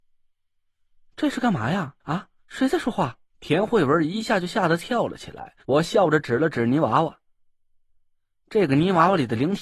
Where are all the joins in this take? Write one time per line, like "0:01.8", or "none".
0:02.0
0:03.3
0:05.6

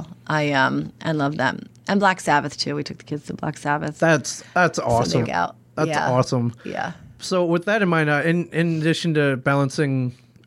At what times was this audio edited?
0:01.8
0:05.2

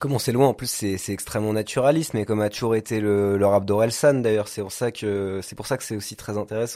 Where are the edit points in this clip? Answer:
none

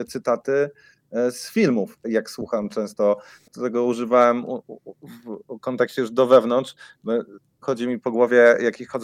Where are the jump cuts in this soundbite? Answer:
0:02.0
0:03.5
0:07.5

